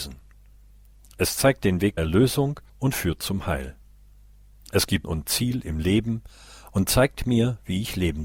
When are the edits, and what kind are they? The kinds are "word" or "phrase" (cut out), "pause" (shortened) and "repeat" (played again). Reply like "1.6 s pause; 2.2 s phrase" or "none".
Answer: 2.0 s word; 2.7 s pause; 5.0 s word